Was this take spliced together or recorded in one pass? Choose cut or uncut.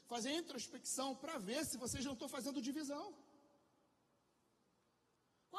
uncut